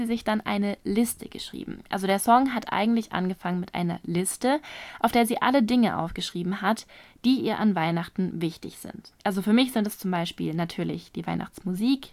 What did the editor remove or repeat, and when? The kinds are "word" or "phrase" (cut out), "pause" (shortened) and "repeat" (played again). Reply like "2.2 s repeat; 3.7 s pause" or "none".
9.2 s pause